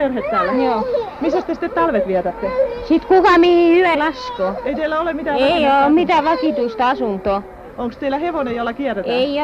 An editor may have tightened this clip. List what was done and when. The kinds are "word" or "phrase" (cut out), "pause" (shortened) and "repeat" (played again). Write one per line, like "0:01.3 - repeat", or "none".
0:03.9 - word